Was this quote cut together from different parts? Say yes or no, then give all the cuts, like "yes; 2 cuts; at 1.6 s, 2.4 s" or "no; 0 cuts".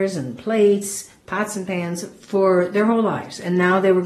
no; 0 cuts